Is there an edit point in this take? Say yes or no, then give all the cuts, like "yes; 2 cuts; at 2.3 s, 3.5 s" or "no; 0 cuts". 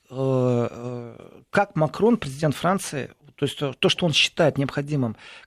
no; 0 cuts